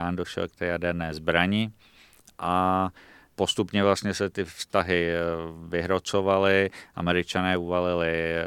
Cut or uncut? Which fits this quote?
uncut